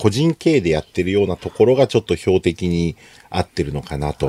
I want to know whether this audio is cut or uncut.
uncut